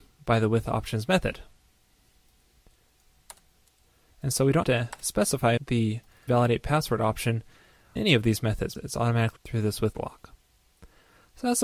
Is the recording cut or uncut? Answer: cut